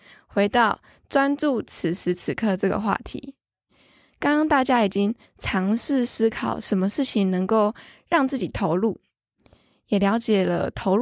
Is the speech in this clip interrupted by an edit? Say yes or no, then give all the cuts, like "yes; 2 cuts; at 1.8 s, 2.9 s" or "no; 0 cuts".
no; 0 cuts